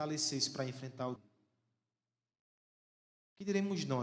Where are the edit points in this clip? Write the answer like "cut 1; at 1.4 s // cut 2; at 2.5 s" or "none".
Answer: cut 1; at 1.2 s